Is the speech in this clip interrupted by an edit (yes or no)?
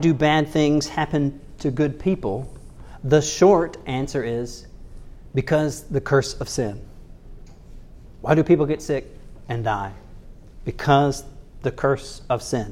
no